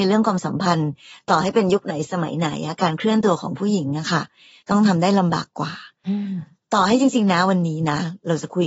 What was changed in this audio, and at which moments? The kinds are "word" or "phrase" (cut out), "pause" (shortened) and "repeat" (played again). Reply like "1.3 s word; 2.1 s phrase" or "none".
none

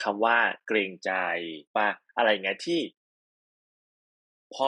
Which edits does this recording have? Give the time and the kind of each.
1.7 s pause

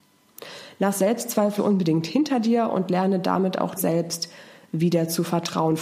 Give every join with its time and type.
1.6 s word; 3.8 s word

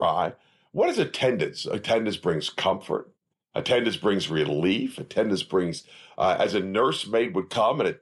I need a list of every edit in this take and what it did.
none

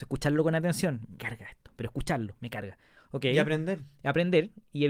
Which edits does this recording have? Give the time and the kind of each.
1.2 s word

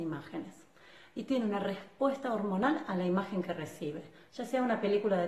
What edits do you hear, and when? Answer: none

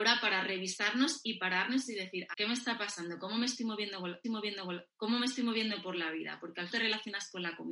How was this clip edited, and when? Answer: 2.3 s word; 4.2 s repeat; 6.7 s phrase

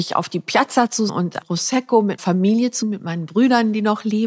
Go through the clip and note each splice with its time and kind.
1.1 s word; 1.4 s word; 2.2 s word; 2.8 s word

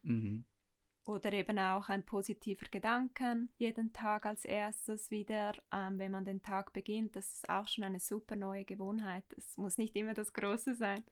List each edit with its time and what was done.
3.5 s pause

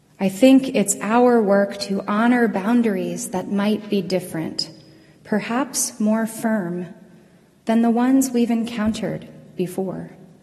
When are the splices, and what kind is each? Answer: none

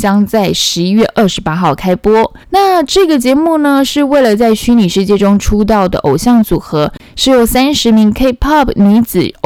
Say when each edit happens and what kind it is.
2.4 s pause

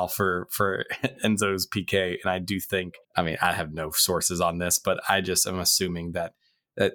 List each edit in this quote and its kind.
3.0 s pause

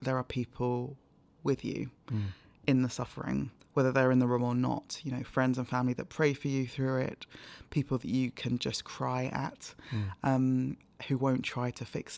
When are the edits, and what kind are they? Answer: none

